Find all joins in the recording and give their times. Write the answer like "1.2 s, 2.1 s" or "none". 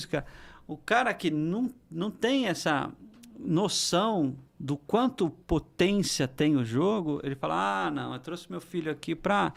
4.5 s, 5.4 s